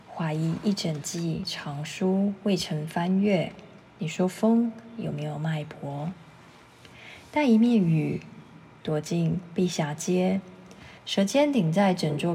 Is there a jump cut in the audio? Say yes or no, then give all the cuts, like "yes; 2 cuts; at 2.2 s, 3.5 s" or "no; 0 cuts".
yes; 2 cuts; at 3.8 s, 11.0 s